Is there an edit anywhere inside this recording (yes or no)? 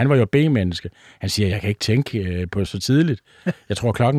no